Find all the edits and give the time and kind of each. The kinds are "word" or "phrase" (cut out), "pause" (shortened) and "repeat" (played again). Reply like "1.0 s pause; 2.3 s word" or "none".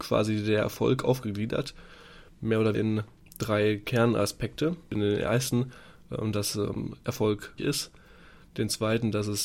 2.7 s word; 7.6 s word